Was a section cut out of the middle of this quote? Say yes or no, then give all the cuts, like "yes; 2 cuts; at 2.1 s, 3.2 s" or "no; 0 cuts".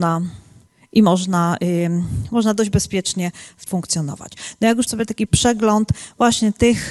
yes; 2 cuts; at 3.7 s, 4.9 s